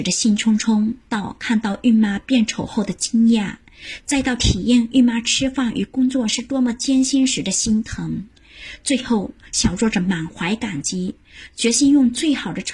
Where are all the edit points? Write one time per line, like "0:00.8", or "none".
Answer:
0:01.0